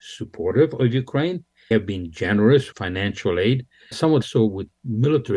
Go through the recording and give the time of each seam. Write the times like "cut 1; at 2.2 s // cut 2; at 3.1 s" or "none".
cut 1; at 1.7 s // cut 2; at 2.7 s // cut 3; at 3.9 s // cut 4; at 4.2 s

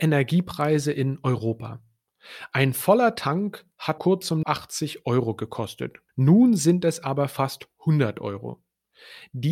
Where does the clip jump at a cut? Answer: cut 1; at 4.0 s // cut 2; at 4.4 s // cut 3; at 6.1 s

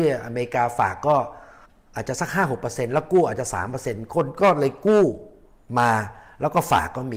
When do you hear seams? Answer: cut 1; at 1.6 s

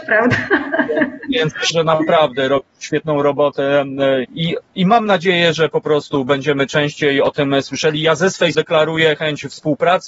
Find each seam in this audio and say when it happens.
cut 1; at 1.7 s // cut 2; at 4.2 s // cut 3; at 8.5 s

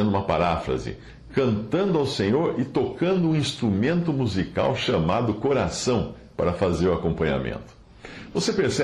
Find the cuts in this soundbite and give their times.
none

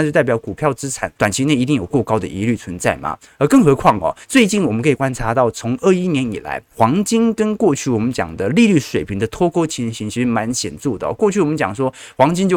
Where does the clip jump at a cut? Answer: cut 1; at 1.1 s // cut 2; at 4.2 s // cut 3; at 6.7 s

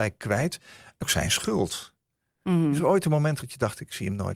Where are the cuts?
cut 1; at 1.0 s // cut 2; at 3.4 s

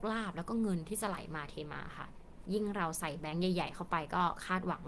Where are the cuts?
cut 1; at 2.4 s

